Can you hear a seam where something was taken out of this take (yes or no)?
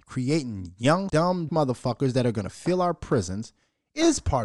yes